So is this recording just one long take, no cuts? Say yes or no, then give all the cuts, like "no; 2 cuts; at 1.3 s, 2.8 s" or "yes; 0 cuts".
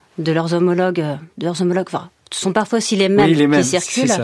yes; 0 cuts